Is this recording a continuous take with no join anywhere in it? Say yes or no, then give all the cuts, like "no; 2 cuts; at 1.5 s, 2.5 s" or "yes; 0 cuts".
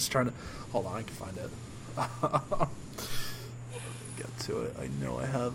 yes; 0 cuts